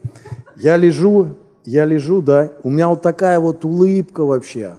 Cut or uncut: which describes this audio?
uncut